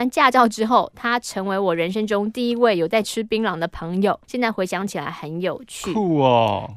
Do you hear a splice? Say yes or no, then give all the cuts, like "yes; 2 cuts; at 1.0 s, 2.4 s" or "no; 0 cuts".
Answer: yes; 1 cut; at 4.2 s